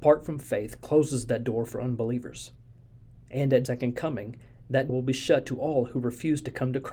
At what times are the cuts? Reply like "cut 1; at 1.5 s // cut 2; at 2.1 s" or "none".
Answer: cut 1; at 3.7 s // cut 2; at 4.9 s